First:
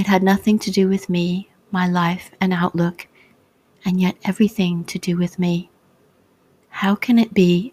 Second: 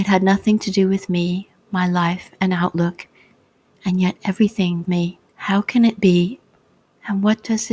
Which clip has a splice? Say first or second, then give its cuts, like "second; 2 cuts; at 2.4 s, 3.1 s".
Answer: second; 2 cuts; at 4.8 s, 5.3 s